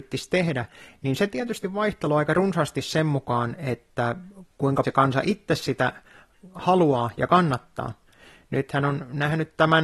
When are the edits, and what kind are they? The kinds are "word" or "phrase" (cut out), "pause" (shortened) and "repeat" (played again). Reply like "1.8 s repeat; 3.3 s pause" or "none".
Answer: 4.8 s word

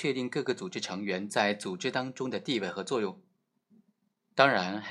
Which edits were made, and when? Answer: none

